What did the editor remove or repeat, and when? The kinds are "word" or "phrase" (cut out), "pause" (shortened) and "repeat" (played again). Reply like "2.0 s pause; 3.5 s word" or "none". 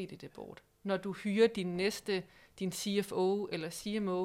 none